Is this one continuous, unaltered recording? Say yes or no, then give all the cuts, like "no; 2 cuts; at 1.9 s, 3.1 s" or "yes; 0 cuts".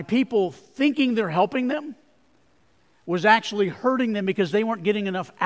yes; 0 cuts